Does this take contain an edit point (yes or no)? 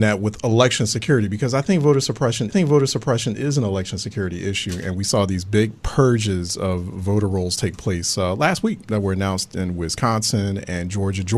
yes